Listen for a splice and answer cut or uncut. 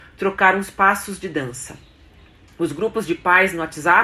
uncut